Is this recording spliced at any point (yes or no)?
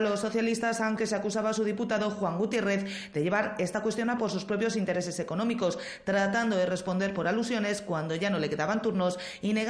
yes